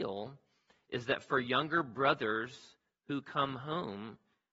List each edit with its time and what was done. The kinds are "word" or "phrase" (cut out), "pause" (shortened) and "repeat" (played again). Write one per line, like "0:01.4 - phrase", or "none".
none